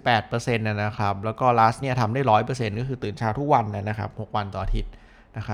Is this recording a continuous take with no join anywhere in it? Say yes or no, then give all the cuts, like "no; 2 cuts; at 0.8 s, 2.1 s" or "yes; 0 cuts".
no; 1 cut; at 1.8 s